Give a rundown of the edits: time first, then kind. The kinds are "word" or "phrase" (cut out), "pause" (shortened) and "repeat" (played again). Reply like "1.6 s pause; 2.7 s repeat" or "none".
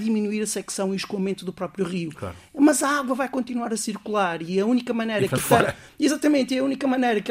5.4 s word